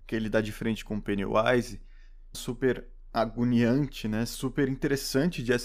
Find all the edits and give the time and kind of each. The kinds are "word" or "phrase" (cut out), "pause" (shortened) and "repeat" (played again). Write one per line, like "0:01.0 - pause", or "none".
0:02.3 - phrase